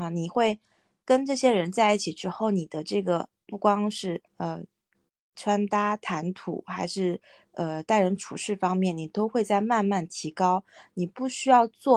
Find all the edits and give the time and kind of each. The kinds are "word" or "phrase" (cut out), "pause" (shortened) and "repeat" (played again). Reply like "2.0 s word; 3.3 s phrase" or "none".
4.3 s pause

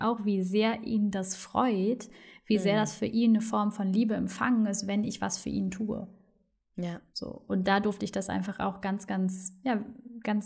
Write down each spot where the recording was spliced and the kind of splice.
none

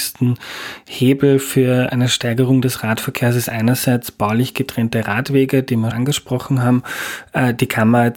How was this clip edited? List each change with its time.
5.9 s word

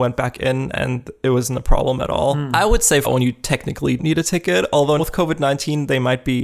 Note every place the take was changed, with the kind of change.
3.0 s word; 4.0 s word; 5.0 s word

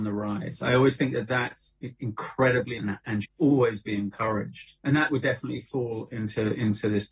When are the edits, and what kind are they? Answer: 2.8 s word; 3.2 s word; 4.8 s pause

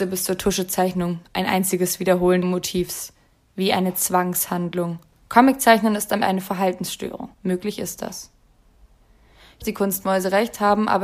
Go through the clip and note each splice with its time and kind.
2.4 s word; 5.1 s pause; 6.2 s word; 7.3 s pause; 9.6 s phrase

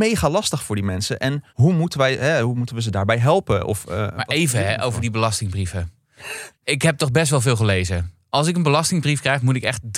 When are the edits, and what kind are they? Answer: 1.5 s pause; 6.6 s pause

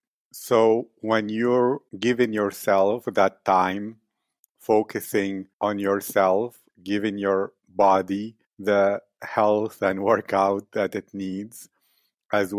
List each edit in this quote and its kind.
1.9 s pause; 5.5 s pause; 8.4 s pause

